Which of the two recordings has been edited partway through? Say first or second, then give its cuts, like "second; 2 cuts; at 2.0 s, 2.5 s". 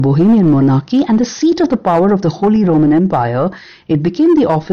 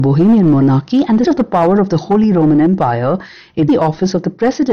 second; 2 cuts; at 1.2 s, 3.7 s